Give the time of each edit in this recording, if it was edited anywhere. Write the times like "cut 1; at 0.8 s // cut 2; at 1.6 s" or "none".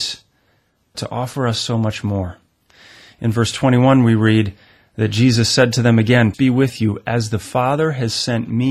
cut 1; at 0.9 s // cut 2; at 6.3 s